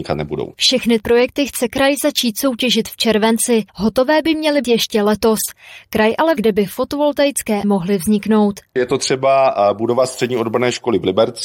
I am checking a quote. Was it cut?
yes; 5 cuts; at 1.0 s, 3.7 s, 4.6 s, 6.4 s, 7.6 s

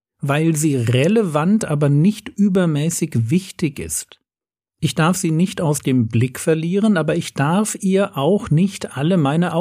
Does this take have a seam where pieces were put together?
no; 0 cuts

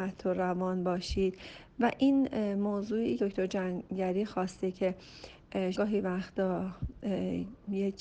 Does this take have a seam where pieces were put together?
yes; 2 cuts; at 3.2 s, 5.7 s

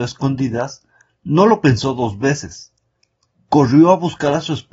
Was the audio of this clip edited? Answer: no; 0 cuts

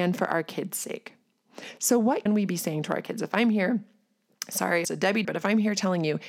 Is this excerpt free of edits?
no; 3 cuts; at 2.3 s, 4.8 s, 5.2 s

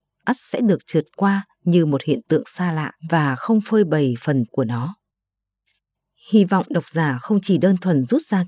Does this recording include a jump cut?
yes; 2 cuts; at 3.0 s, 4.5 s

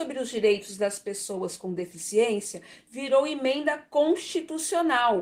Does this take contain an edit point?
no; 0 cuts

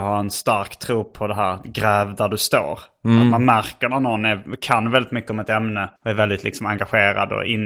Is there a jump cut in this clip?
yes; 1 cut; at 6.0 s

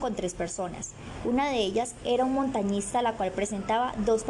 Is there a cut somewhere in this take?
no; 0 cuts

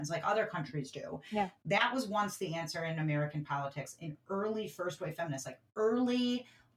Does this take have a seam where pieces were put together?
no; 0 cuts

